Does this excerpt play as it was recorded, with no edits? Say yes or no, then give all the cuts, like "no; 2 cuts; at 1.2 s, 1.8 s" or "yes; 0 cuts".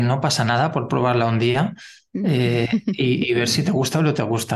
yes; 0 cuts